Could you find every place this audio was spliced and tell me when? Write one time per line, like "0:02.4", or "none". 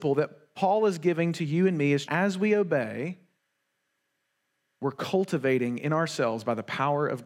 0:02.0

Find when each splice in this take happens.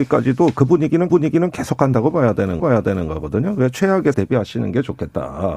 0:01.1
0:02.6
0:04.1

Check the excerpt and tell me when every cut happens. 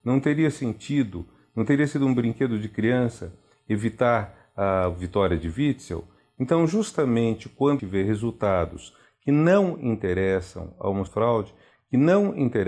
0:07.8
0:11.1

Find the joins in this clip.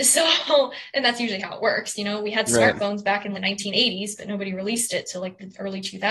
0:03.3

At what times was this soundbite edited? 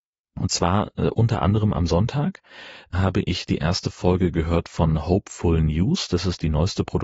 none

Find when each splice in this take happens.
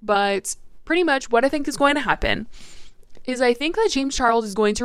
none

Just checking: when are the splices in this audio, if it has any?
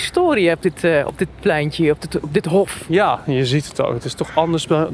none

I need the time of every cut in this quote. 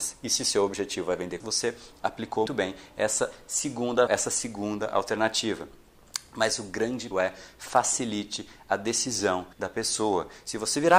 0:01.4
0:02.5
0:04.1
0:07.1
0:09.5

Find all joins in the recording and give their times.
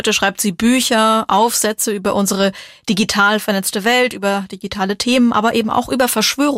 none

